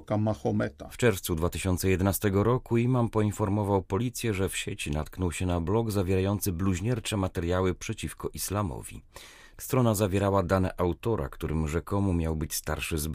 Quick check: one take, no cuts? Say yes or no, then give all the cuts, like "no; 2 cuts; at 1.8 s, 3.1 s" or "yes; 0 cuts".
yes; 0 cuts